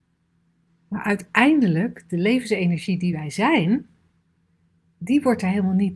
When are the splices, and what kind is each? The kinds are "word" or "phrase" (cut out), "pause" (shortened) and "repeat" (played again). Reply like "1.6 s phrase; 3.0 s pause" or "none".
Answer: none